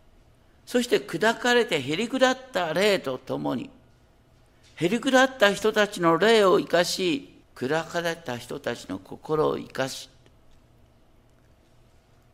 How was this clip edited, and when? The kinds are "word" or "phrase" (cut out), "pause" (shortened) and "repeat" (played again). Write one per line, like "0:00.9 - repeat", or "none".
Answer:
0:07.4 - pause